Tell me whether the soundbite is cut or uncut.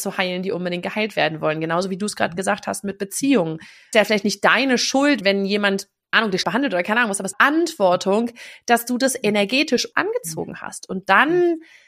cut